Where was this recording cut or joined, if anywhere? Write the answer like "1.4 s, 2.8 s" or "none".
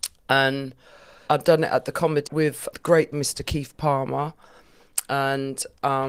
1.3 s, 2.3 s, 2.7 s, 3.1 s

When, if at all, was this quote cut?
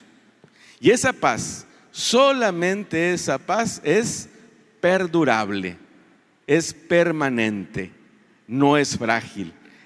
none

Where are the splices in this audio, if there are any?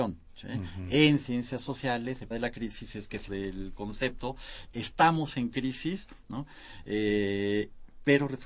2.3 s, 3.3 s, 4.7 s

